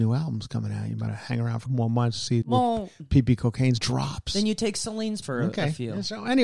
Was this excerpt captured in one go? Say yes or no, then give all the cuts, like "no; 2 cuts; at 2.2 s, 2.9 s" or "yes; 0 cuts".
no; 5 cuts; at 1.1 s, 1.7 s, 2.4 s, 3.8 s, 5.2 s